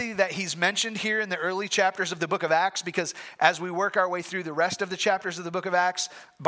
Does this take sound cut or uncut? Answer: uncut